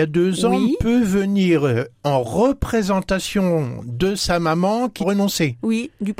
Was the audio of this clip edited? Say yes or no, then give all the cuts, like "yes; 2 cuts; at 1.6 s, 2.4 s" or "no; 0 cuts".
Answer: yes; 1 cut; at 5.0 s